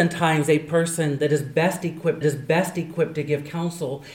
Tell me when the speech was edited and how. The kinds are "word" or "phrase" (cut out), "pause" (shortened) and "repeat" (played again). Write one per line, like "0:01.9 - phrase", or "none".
0:02.2 - repeat